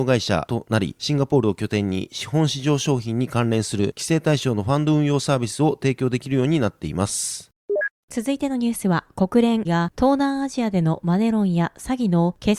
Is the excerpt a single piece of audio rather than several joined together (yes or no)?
no